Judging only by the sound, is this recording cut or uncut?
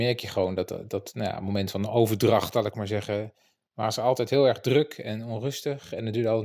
uncut